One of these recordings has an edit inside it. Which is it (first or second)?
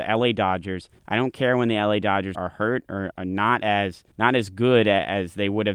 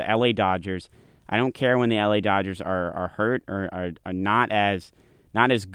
first